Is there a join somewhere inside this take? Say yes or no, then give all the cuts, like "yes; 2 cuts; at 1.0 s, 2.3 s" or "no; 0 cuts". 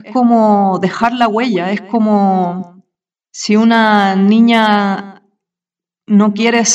no; 0 cuts